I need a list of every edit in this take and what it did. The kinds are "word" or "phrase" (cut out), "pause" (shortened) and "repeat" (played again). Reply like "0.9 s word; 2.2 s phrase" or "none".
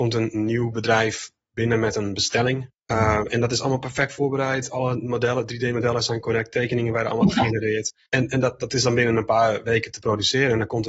2.8 s pause; 8.1 s pause